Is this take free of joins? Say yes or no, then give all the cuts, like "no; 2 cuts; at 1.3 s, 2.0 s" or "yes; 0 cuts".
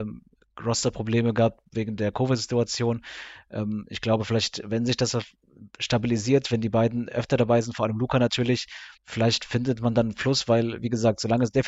no; 1 cut; at 9.0 s